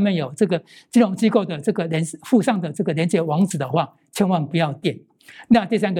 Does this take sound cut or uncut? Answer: uncut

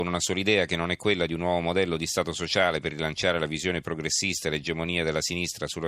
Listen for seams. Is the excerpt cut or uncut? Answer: uncut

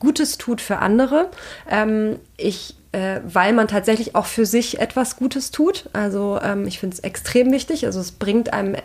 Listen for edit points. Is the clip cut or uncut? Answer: uncut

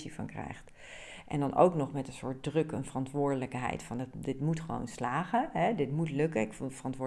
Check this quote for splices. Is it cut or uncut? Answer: uncut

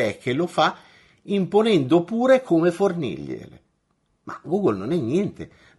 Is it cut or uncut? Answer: uncut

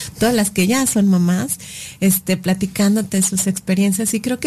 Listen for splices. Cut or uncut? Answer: uncut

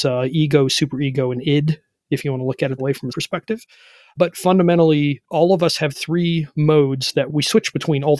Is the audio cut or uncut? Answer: cut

